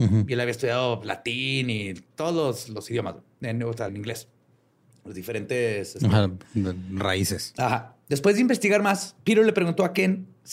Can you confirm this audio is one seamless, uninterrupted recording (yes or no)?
no